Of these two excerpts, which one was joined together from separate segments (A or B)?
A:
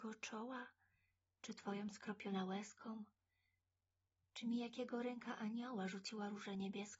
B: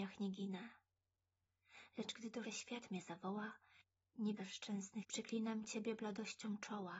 B